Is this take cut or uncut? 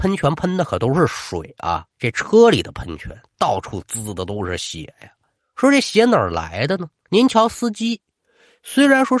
cut